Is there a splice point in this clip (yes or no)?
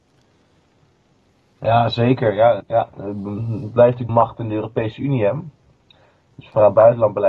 yes